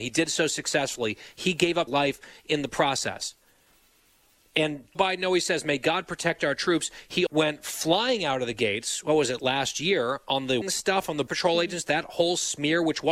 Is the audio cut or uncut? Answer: cut